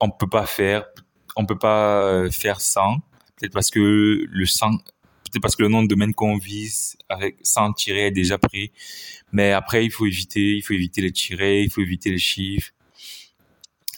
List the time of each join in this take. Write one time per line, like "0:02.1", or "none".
0:03.2